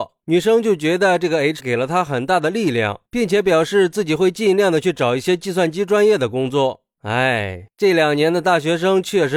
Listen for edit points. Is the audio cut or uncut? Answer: cut